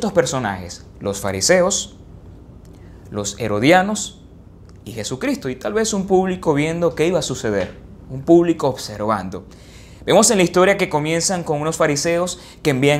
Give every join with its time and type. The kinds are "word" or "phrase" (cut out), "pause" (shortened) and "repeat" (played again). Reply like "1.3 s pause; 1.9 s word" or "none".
none